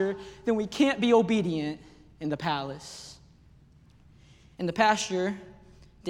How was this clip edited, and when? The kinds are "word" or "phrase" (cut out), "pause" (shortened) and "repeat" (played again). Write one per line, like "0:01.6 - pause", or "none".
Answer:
none